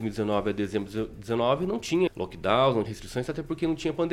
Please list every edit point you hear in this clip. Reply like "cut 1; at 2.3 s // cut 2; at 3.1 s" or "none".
cut 1; at 2.1 s // cut 2; at 2.9 s

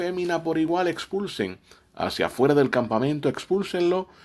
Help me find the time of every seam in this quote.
none

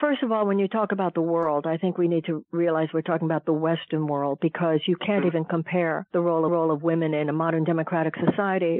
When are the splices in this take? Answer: cut 1; at 6.5 s

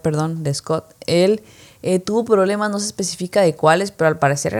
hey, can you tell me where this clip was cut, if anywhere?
none

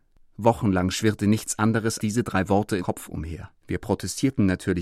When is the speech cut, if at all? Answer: cut 1; at 2.0 s // cut 2; at 2.8 s // cut 3; at 3.6 s

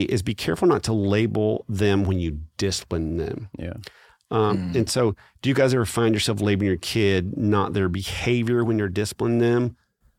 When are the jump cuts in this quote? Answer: none

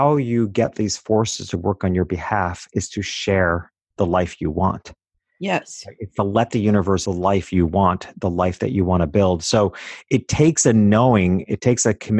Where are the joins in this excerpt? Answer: cut 1; at 7.1 s

